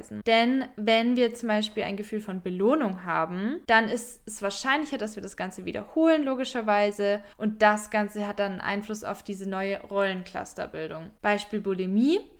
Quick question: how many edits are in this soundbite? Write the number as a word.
one